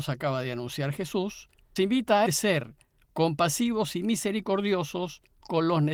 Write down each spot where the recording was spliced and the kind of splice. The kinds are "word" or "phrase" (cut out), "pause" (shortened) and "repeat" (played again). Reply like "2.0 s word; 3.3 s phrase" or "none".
1.8 s word; 2.3 s word

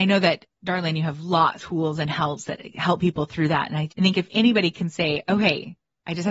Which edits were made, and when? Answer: 1.6 s word; 3.9 s word

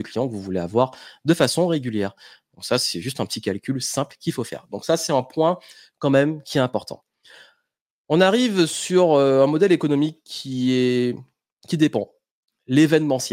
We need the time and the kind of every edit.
none

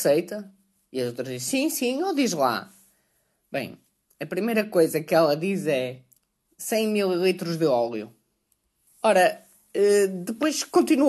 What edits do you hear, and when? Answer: none

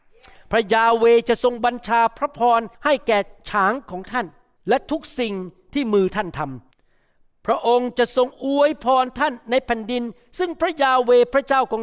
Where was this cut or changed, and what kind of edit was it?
2.7 s pause; 4.6 s pause; 6.7 s pause

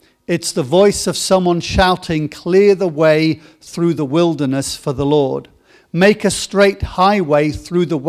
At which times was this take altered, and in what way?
none

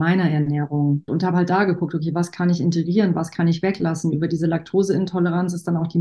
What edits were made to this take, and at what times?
1.1 s word

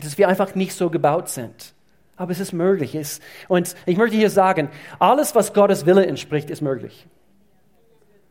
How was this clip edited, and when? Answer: none

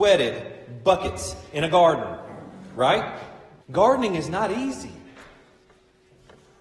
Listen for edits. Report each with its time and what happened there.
3.6 s pause

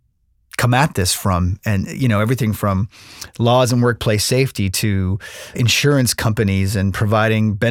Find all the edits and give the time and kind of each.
5.5 s word

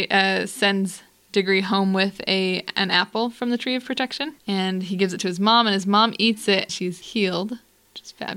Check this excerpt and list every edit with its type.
6.7 s word

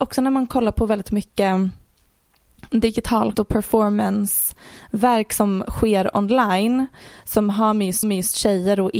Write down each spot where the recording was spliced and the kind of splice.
3.3 s word; 8.0 s repeat

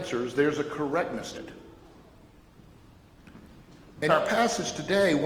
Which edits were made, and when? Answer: 1.3 s word; 4.1 s word

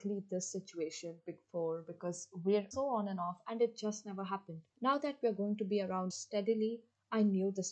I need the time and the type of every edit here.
2.7 s word; 4.7 s pause; 6.1 s phrase

